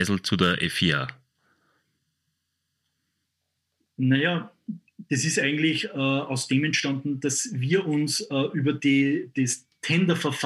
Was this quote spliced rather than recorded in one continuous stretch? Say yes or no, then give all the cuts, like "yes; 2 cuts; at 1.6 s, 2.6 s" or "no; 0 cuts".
no; 0 cuts